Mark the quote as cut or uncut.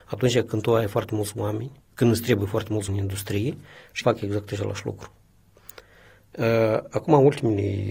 cut